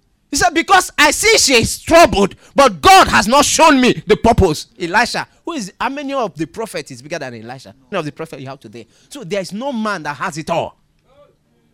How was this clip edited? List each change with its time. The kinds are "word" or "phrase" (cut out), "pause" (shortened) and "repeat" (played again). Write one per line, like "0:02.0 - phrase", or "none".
0:04.7 - pause
0:07.9 - word